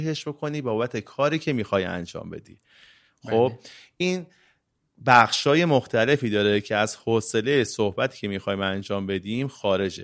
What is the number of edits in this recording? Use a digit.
0